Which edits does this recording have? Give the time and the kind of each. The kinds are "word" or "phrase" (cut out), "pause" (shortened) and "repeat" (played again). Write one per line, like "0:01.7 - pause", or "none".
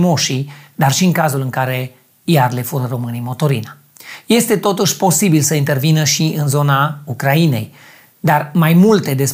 none